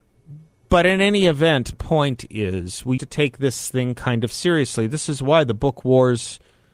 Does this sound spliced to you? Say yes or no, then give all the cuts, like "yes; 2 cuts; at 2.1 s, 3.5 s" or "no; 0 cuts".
yes; 2 cuts; at 1.7 s, 3.0 s